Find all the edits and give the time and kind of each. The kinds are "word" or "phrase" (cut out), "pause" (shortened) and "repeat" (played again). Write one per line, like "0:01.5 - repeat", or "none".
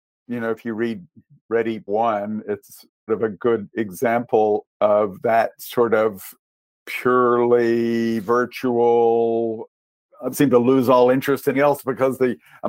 0:01.9 - word
0:03.1 - word
0:04.6 - word
0:10.3 - word
0:11.5 - word